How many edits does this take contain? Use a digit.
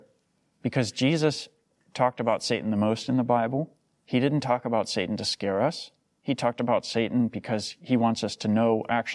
0